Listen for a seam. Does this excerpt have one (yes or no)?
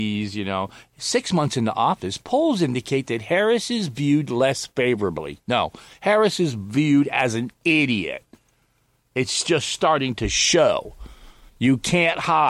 no